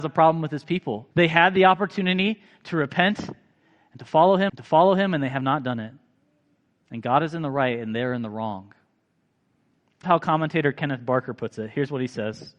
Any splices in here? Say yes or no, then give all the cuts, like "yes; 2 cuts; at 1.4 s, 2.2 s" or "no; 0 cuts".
yes; 3 cuts; at 1.1 s, 4.5 s, 10.0 s